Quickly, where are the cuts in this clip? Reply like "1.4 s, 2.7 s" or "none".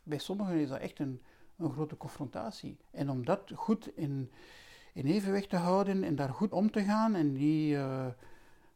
2.8 s, 4.0 s, 6.5 s